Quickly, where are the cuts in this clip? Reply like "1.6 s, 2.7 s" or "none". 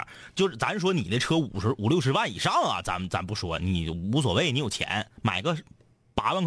5.1 s